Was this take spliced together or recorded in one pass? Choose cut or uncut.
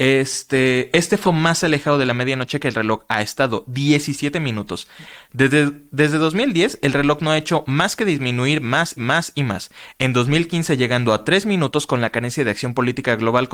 cut